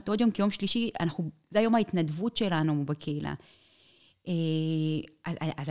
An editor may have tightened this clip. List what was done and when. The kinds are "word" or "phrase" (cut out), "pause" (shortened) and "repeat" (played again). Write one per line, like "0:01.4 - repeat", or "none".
none